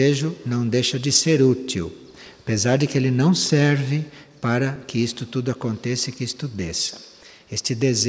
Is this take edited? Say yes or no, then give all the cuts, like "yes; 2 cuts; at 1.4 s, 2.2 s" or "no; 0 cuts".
no; 0 cuts